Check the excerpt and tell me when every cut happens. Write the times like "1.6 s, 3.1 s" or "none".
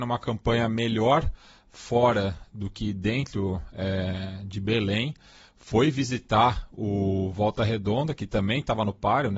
none